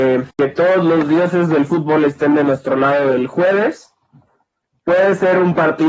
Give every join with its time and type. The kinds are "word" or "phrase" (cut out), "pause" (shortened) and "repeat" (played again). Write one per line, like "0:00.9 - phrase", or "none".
none